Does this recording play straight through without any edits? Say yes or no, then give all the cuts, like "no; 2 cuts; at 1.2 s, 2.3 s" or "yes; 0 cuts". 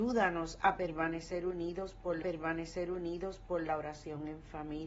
no; 1 cut; at 2.2 s